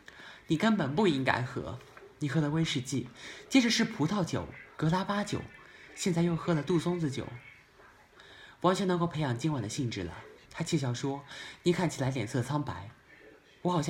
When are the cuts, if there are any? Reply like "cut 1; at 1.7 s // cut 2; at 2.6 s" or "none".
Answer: cut 1; at 4.7 s // cut 2; at 10.4 s